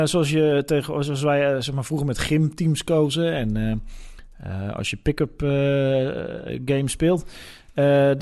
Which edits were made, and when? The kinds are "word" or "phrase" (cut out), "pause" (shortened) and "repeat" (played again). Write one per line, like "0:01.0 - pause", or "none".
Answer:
none